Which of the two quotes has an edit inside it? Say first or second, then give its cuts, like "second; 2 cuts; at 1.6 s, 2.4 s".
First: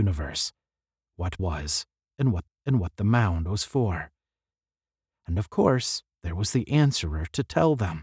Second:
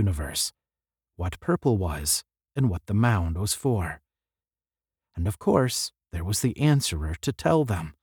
first; 2 cuts; at 1.4 s, 2.5 s